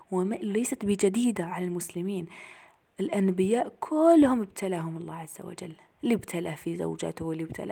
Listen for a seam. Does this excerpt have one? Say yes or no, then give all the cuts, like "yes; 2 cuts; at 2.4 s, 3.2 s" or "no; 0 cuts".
no; 0 cuts